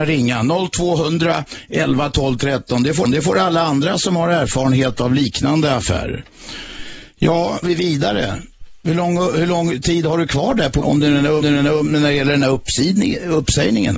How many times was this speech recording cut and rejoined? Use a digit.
4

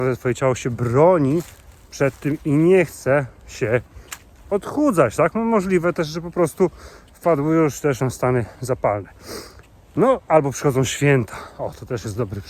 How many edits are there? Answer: 1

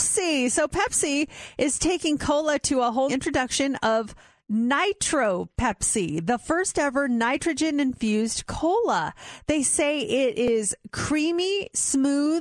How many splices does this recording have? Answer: 1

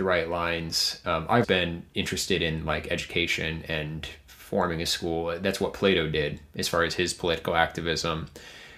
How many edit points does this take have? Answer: 1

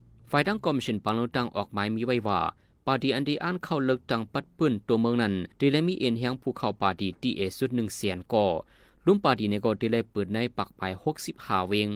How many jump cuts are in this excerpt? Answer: 1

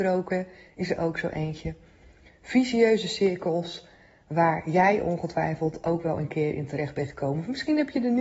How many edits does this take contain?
0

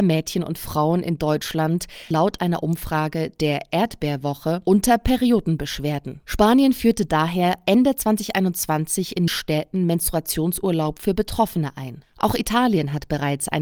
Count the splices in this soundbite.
2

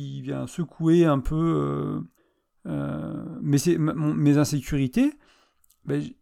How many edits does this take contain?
1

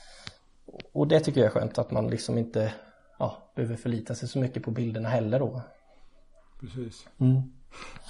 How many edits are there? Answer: 0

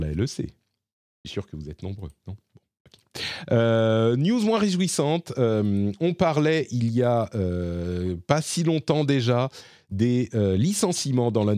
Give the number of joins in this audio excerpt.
0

